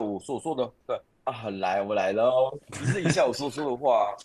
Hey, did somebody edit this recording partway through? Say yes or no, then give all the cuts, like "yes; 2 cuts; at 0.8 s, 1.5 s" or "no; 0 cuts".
yes; 2 cuts; at 1.1 s, 2.6 s